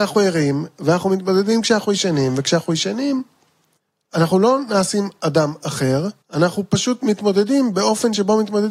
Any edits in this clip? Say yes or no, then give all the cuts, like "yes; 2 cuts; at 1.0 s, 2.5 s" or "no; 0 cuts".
yes; 2 cuts; at 3.8 s, 6.2 s